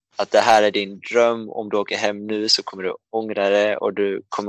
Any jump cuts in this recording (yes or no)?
no